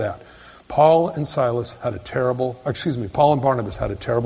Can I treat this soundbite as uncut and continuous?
yes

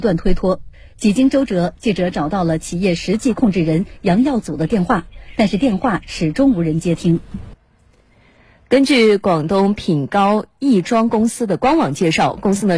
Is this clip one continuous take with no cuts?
yes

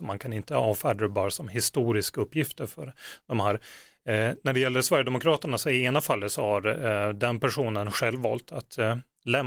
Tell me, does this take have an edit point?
no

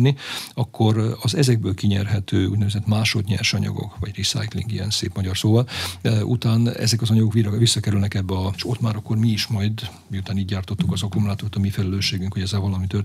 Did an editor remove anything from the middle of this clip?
yes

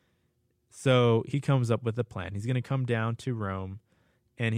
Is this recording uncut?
yes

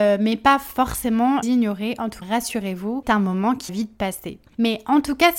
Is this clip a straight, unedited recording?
no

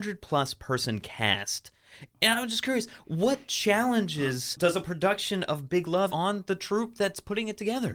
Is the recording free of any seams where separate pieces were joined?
no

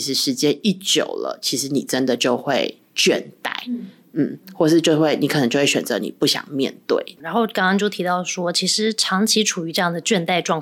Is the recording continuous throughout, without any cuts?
yes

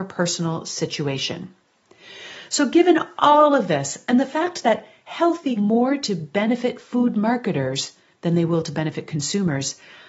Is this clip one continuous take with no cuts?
no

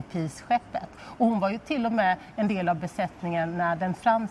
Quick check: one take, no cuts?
yes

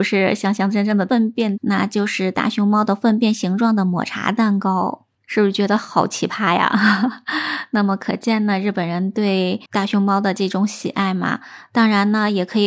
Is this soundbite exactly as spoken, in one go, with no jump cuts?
no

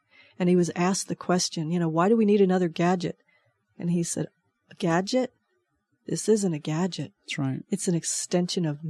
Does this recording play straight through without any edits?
yes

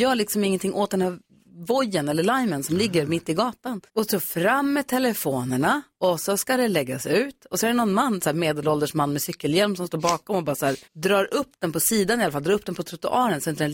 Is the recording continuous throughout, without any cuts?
no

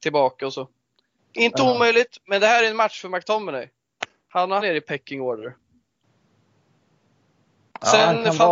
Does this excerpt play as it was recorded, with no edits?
no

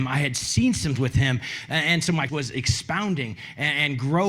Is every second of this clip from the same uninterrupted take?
no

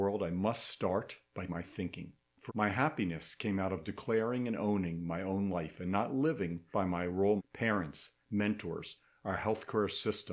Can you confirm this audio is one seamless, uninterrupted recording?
no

